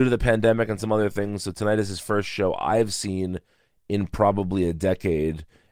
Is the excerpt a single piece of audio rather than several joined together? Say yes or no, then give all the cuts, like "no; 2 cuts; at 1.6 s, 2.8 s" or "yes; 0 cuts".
yes; 0 cuts